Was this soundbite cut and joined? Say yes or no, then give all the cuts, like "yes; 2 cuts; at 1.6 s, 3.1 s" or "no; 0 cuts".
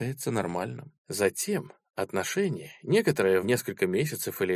yes; 2 cuts; at 1.0 s, 3.4 s